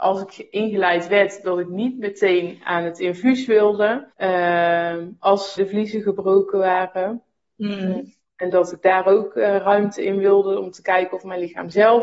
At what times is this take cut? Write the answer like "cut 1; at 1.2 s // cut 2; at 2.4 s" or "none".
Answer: cut 1; at 4.1 s // cut 2; at 5.6 s